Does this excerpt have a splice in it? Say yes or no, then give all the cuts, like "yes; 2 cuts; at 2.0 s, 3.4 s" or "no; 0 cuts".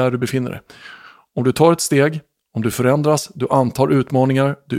no; 0 cuts